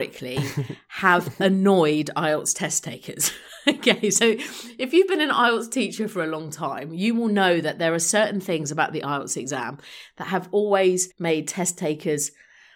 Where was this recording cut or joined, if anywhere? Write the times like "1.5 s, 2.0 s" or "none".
11.1 s